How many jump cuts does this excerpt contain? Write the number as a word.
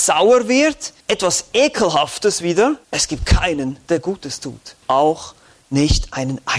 three